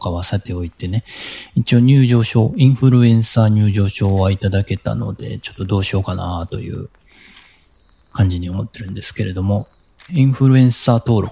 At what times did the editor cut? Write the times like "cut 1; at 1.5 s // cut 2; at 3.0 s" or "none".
cut 1; at 10.1 s